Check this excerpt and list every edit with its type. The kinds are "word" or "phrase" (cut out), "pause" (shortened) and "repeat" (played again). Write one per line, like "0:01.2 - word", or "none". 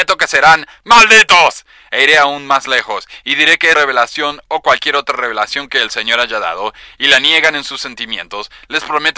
0:03.7 - word